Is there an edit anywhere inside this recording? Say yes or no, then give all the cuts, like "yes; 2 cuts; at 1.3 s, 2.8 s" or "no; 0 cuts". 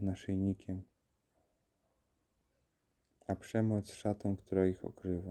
no; 0 cuts